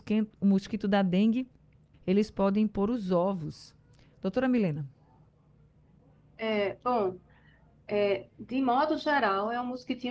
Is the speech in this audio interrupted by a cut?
yes; 1 cut; at 1.9 s

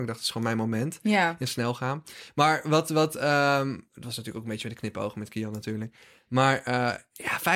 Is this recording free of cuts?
yes; 0 cuts

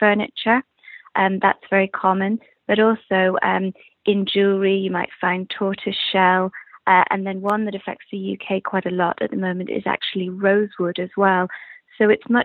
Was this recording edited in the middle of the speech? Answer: no; 0 cuts

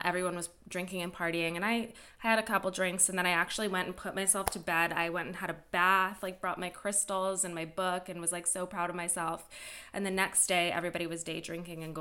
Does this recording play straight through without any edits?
yes; 0 cuts

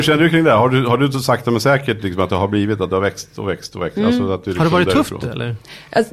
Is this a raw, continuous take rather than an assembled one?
yes; 0 cuts

